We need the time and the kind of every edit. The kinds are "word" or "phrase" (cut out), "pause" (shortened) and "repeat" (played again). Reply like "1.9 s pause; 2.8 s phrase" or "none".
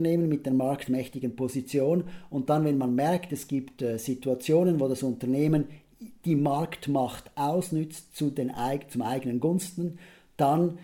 3.5 s phrase